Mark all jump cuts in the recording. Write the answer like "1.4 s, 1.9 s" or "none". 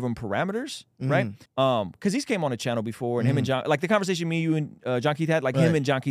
1.5 s